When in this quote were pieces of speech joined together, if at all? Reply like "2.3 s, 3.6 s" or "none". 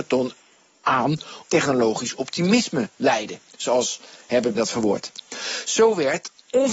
1.4 s, 4.6 s